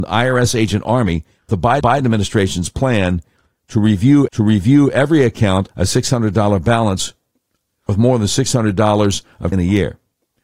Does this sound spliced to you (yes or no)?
yes